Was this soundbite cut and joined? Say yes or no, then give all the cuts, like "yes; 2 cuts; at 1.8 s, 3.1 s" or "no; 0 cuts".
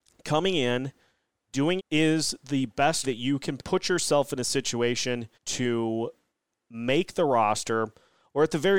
yes; 4 cuts; at 1.8 s, 3.0 s, 3.6 s, 5.3 s